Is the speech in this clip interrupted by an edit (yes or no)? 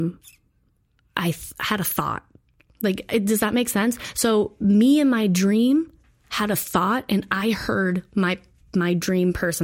no